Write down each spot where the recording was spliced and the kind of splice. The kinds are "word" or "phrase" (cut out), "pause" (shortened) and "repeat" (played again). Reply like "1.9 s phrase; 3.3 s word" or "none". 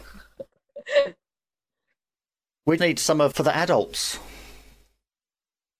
2.8 s word; 3.3 s word